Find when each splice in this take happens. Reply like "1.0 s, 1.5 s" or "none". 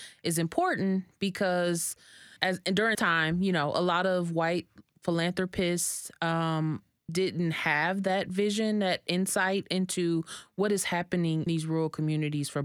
2.4 s, 2.9 s, 7.1 s, 11.5 s